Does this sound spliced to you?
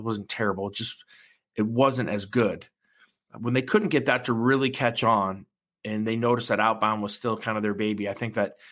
no; 0 cuts

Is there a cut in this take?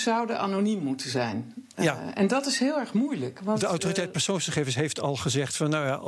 no; 0 cuts

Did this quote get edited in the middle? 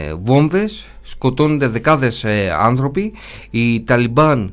no; 0 cuts

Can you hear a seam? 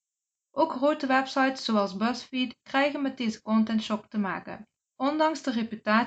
yes; 1 cut; at 4.8 s

